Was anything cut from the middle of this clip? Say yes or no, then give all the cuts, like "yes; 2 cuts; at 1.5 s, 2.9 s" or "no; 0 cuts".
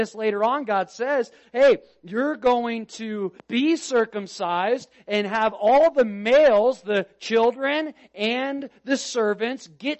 yes; 1 cut; at 3.4 s